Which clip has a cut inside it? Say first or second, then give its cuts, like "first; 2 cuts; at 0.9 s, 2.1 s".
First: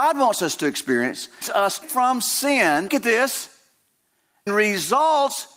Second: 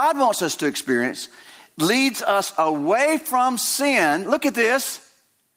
first; 4 cuts; at 1.4 s, 1.8 s, 2.9 s, 4.5 s